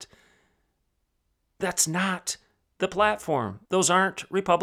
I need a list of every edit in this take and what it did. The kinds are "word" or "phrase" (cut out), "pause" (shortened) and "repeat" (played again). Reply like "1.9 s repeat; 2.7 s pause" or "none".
3.7 s pause